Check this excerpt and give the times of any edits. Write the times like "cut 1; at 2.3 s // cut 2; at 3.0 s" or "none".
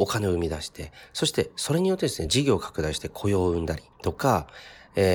cut 1; at 3.9 s